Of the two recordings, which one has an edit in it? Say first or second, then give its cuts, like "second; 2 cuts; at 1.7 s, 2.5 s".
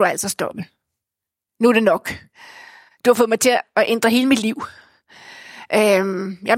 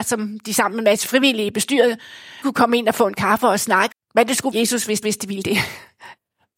second; 5 cuts; at 2.4 s, 3.1 s, 3.9 s, 4.5 s, 5.0 s